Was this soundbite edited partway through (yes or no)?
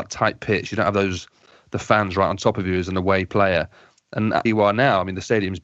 yes